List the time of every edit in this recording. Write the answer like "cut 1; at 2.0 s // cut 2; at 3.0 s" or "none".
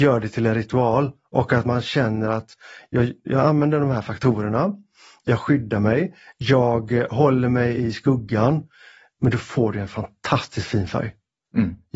none